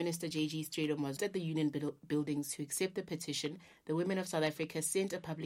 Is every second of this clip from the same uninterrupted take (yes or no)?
no